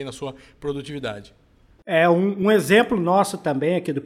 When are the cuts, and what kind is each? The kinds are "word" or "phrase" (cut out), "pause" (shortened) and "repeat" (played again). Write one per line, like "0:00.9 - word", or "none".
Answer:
none